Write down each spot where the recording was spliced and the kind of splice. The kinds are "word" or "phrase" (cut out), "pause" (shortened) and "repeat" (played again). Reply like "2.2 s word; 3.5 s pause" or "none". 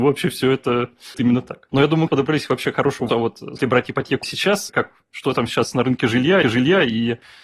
1.1 s word; 1.7 s pause; 2.1 s word; 3.1 s word; 3.6 s word; 4.2 s word; 4.7 s word; 6.4 s repeat